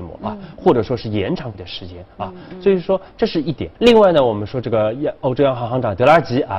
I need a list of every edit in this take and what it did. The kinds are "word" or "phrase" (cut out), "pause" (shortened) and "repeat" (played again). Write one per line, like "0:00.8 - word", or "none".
0:01.5 - word
0:03.7 - pause